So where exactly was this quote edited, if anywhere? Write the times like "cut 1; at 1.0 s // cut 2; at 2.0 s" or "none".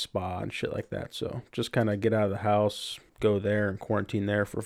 cut 1; at 3.1 s